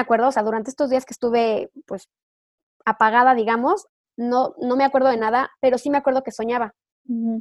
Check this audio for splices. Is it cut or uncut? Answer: uncut